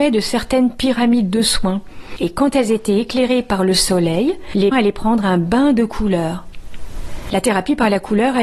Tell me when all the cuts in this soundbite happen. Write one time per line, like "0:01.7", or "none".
0:04.7